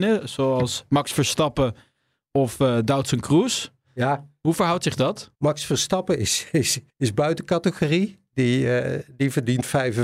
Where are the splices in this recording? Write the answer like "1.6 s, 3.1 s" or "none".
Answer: 5.3 s, 6.9 s